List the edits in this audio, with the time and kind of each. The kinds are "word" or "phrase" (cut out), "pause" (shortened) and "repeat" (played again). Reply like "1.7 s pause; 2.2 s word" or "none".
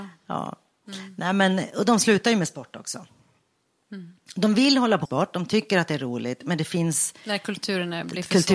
5.1 s word